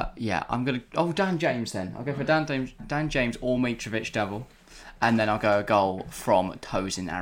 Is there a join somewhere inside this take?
yes; 1 cut; at 2.8 s

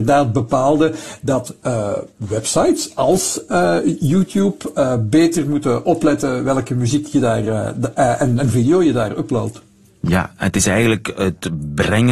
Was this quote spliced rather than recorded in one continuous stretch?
no; 0 cuts

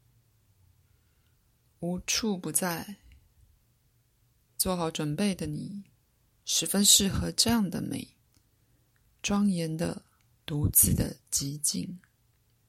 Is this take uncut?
yes; 0 cuts

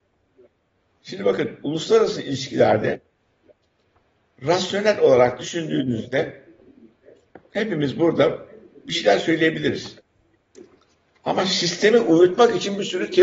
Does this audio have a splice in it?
no; 0 cuts

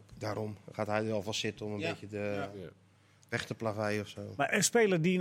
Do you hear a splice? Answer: no; 0 cuts

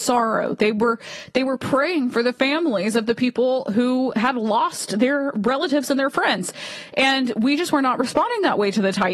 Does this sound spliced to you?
no; 0 cuts

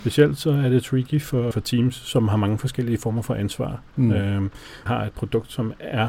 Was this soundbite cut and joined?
yes; 2 cuts; at 1.5 s, 4.9 s

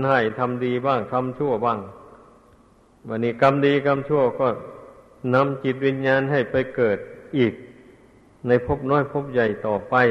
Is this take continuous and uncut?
yes; 0 cuts

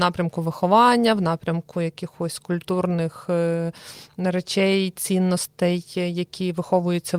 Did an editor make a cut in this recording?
no; 0 cuts

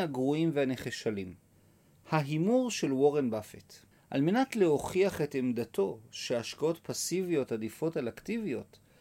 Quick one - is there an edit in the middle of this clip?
yes; 2 cuts; at 1.5 s, 3.9 s

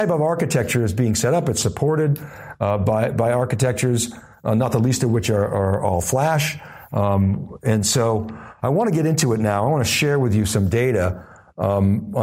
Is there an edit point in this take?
no; 0 cuts

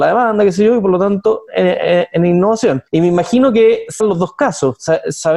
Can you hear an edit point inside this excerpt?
yes; 3 cuts; at 1.5 s, 2.9 s, 4.0 s

